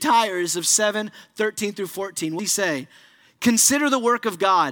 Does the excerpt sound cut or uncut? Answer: cut